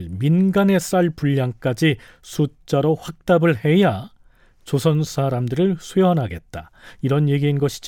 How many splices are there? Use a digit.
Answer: 0